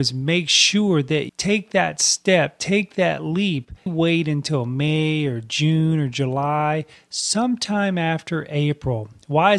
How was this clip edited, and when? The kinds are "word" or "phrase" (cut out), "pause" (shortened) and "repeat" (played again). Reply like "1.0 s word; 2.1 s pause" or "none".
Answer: 1.3 s word; 3.9 s word

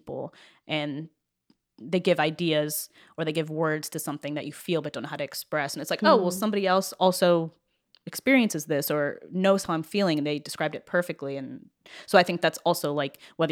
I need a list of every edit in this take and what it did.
none

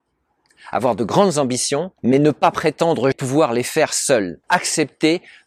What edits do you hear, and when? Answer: 2.0 s pause; 3.1 s word; 4.4 s pause

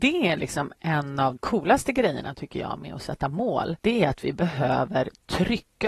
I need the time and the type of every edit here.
1.4 s word; 3.8 s pause

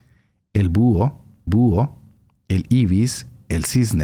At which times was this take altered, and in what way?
1.5 s repeat

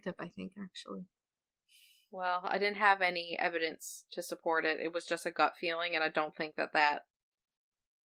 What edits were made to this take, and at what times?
none

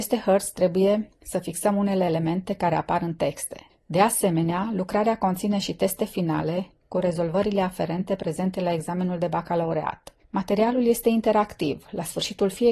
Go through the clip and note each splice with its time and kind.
none

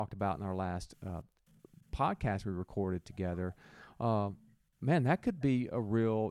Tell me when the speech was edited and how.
none

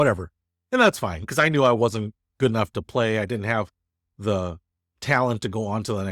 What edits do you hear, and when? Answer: none

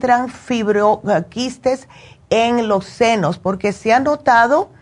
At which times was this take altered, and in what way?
none

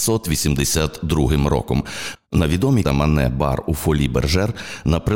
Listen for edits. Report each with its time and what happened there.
2.8 s phrase

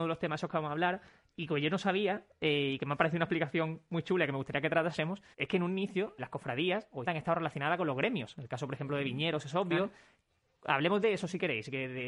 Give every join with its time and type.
5.3 s pause; 6.2 s word; 7.1 s word

